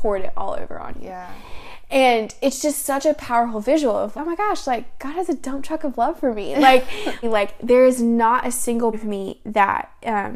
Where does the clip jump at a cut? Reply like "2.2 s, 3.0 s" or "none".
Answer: 4.1 s, 7.2 s, 8.9 s